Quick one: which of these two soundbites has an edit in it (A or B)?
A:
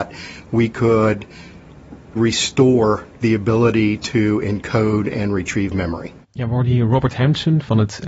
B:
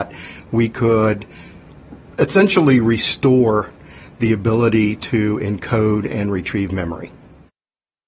A